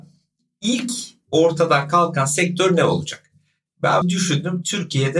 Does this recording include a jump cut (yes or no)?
yes